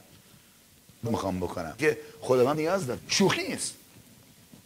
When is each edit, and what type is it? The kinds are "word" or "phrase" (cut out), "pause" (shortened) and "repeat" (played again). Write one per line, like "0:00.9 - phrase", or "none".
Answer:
0:01.1 - word
0:01.8 - word
0:02.5 - word
0:03.0 - word
0:03.4 - word